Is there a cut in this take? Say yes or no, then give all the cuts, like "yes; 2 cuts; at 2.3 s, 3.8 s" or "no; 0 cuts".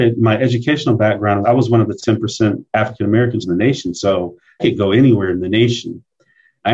yes; 4 cuts; at 1.4 s, 2.0 s, 3.4 s, 4.6 s